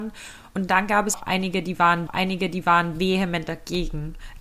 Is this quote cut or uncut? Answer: cut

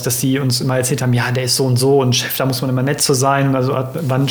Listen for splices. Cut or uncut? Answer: uncut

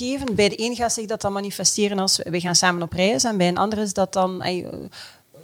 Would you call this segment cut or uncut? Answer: uncut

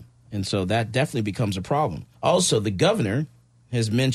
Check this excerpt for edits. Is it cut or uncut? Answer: cut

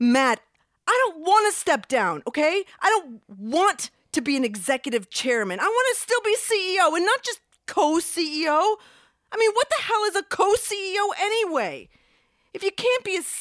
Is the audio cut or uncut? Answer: uncut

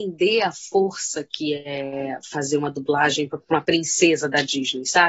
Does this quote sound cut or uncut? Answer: uncut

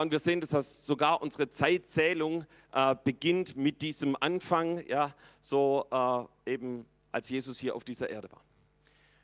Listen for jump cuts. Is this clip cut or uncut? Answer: uncut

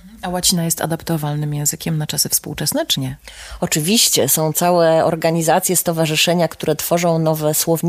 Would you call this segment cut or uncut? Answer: cut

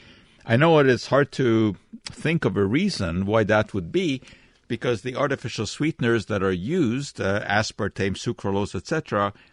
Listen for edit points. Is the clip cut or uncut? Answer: uncut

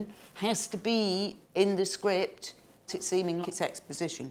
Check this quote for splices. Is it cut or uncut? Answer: cut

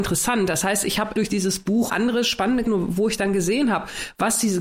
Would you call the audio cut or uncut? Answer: cut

